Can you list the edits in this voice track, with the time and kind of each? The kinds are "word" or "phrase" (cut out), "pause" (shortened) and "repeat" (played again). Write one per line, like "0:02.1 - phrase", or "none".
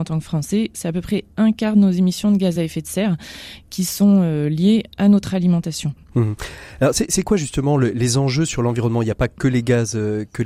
none